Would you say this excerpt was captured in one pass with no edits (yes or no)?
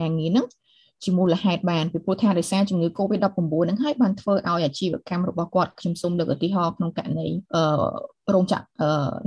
no